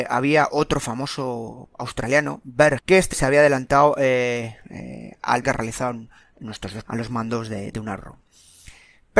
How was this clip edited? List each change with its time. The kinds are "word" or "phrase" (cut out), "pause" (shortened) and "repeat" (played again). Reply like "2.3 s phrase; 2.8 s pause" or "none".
1.7 s word; 2.8 s word; 3.1 s word; 5.4 s word; 6.9 s word; 7.7 s word